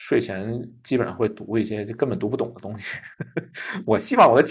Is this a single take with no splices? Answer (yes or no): no